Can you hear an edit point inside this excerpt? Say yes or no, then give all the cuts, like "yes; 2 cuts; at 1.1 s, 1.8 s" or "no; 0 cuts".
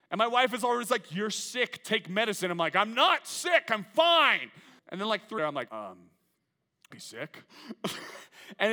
yes; 4 cuts; at 4.8 s, 5.4 s, 5.7 s, 6.9 s